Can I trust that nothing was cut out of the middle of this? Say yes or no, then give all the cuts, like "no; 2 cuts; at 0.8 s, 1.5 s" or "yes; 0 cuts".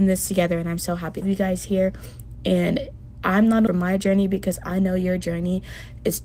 no; 2 cuts; at 1.2 s, 3.7 s